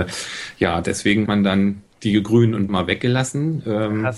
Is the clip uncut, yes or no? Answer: no